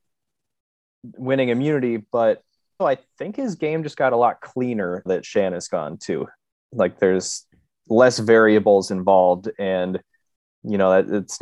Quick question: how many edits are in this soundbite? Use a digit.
2